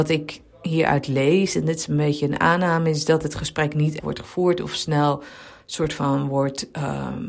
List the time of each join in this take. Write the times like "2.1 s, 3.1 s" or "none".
4.0 s